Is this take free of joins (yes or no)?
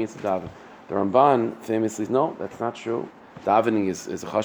no